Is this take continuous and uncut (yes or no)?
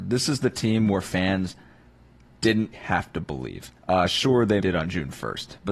no